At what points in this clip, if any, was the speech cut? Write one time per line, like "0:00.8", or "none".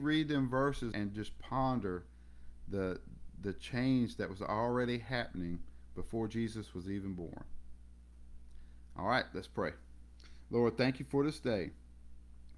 0:00.9